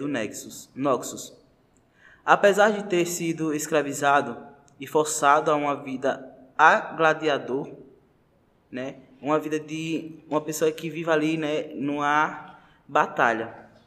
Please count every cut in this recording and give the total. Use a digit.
0